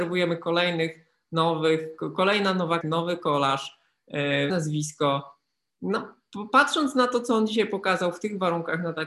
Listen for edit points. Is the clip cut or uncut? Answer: cut